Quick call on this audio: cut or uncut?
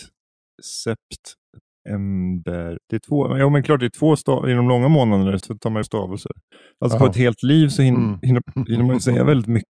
cut